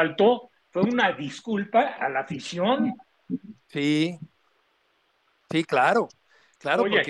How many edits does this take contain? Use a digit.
0